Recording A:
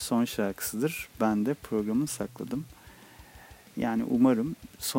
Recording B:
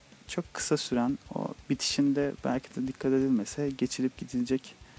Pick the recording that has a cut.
A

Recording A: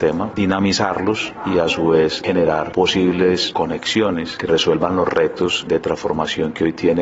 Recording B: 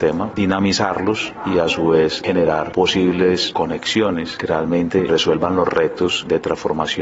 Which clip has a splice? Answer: A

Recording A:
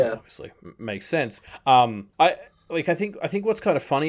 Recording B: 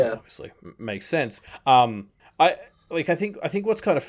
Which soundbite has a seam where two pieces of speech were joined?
A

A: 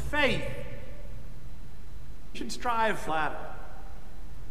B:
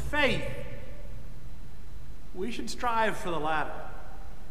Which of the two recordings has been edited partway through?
A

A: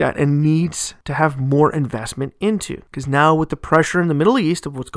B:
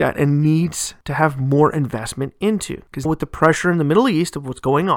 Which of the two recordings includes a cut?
B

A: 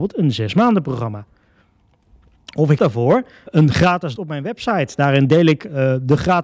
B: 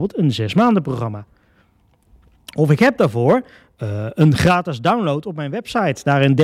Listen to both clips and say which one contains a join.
A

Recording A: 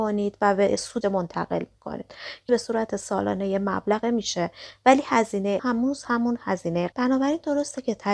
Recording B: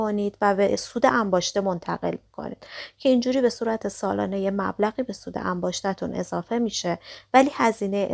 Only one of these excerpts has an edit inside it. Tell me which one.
A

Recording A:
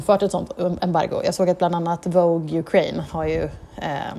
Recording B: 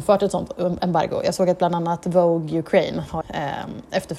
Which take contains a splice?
B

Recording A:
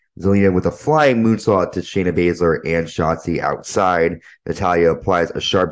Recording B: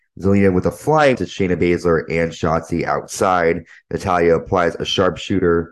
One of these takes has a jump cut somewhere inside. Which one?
B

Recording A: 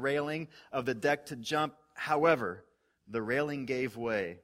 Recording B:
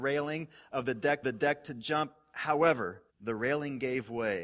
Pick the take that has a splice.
B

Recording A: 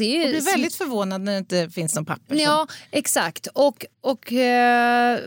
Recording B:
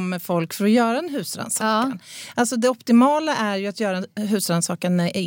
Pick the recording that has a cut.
A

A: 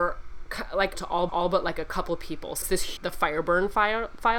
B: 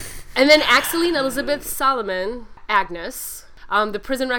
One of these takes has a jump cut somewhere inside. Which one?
A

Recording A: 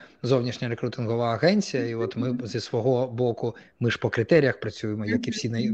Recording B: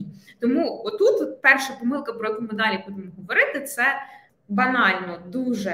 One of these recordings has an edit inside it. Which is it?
B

